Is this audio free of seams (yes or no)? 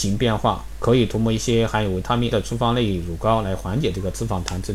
no